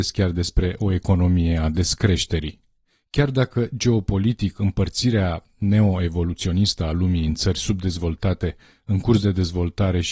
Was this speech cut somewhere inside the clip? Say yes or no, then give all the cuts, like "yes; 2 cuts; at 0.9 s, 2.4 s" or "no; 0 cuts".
no; 0 cuts